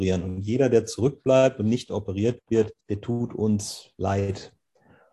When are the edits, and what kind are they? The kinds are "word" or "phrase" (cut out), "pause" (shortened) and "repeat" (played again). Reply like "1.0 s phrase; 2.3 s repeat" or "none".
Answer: 2.8 s pause